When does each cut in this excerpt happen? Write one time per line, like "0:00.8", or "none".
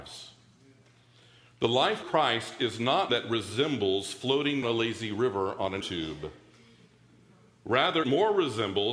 0:02.0
0:03.1
0:04.6
0:05.8
0:08.0